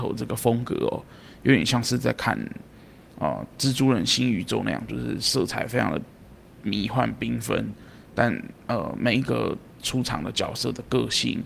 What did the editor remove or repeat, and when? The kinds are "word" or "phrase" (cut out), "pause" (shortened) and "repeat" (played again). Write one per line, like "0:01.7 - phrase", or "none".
none